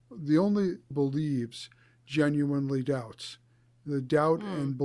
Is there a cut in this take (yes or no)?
yes